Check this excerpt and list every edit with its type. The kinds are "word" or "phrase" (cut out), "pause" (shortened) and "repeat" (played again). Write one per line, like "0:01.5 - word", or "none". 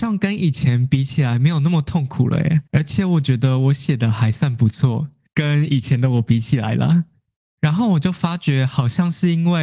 0:02.7 - pause